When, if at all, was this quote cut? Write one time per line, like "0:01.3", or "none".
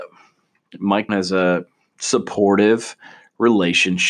0:01.1